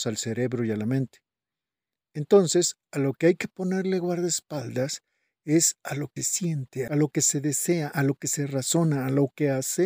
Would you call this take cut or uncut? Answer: cut